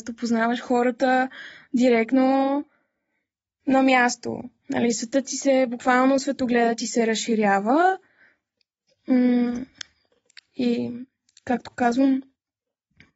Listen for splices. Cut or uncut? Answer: uncut